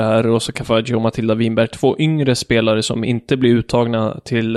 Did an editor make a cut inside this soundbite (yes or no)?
no